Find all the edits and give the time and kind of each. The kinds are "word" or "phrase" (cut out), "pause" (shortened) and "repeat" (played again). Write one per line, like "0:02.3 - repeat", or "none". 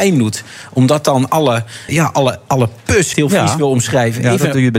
0:01.9 - word
0:03.1 - phrase